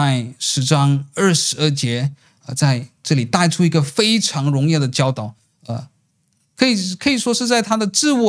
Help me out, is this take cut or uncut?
uncut